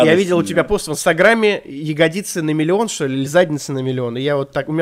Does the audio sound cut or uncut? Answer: uncut